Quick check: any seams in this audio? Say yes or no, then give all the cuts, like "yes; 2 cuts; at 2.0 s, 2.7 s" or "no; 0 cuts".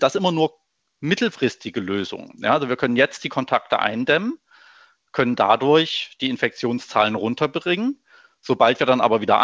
no; 0 cuts